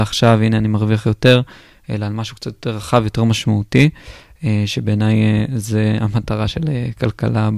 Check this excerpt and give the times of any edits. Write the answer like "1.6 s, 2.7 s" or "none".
none